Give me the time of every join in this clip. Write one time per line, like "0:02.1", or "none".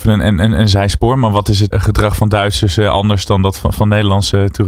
0:01.7